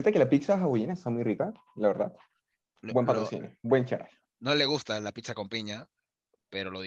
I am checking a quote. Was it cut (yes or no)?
no